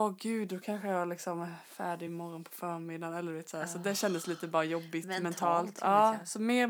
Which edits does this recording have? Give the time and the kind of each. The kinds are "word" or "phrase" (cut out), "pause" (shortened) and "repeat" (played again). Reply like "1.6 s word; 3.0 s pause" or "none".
none

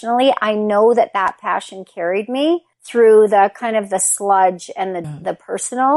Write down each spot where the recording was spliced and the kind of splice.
2.7 s pause; 5.0 s phrase

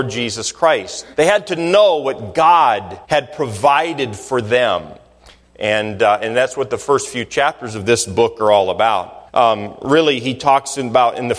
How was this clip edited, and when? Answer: 1.1 s pause; 3.0 s pause; 9.3 s pause

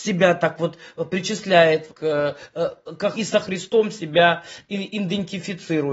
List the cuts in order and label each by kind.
1.9 s word; 3.1 s word

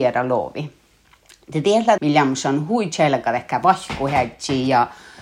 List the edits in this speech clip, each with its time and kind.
2.0 s word

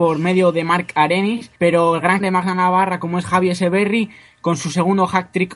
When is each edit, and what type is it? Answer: 1.6 s pause; 2.2 s word

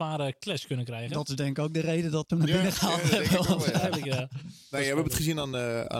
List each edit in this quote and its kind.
2.3 s phrase

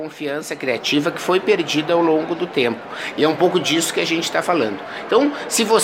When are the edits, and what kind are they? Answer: none

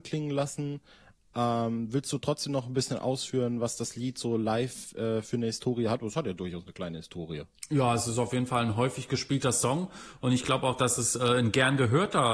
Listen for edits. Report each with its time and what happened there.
none

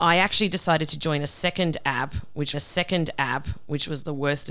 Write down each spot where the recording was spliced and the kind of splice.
2.5 s repeat

